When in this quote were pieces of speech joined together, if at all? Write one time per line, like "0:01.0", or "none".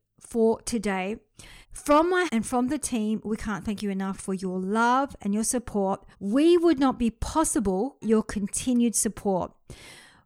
0:01.6
0:02.3
0:06.1
0:08.0